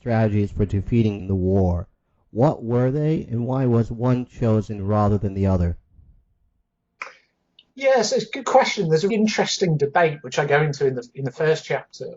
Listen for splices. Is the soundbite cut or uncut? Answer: cut